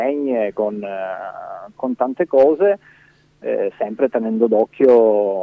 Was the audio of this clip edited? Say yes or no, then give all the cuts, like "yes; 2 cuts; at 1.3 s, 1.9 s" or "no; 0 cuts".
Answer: no; 0 cuts